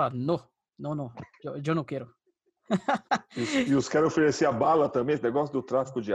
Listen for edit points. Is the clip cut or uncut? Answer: cut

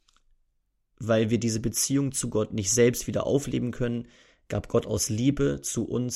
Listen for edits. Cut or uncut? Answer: uncut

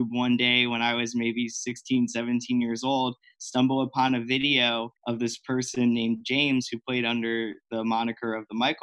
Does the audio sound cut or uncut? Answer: cut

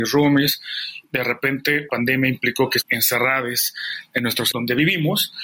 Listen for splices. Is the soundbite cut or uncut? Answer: cut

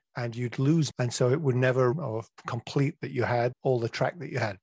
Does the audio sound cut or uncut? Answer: cut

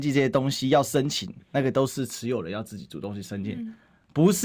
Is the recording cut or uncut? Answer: uncut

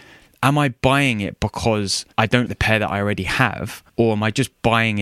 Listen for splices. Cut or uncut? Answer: cut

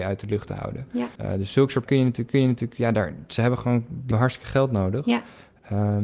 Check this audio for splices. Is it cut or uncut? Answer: cut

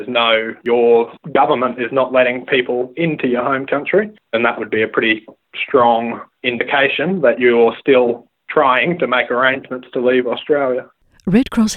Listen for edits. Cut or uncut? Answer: uncut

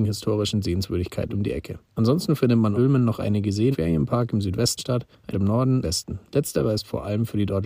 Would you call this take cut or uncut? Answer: cut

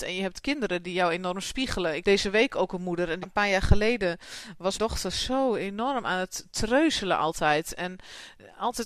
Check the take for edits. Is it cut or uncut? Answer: cut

